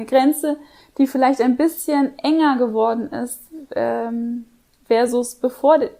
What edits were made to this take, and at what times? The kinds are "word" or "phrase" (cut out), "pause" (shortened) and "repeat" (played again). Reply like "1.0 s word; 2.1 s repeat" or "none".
none